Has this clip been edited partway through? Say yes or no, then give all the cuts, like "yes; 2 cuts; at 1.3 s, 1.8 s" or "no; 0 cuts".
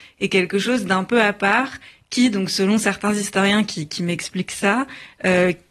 no; 0 cuts